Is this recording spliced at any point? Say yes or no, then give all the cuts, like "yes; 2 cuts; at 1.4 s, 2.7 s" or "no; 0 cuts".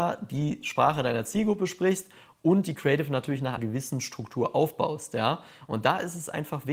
yes; 1 cut; at 3.6 s